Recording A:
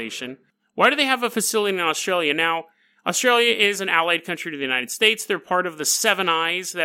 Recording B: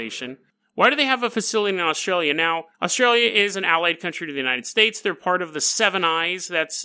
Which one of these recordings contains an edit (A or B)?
B